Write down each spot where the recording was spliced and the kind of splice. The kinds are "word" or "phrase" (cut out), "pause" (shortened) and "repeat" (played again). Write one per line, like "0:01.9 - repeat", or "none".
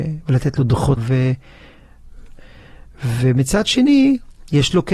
0:01.0 - word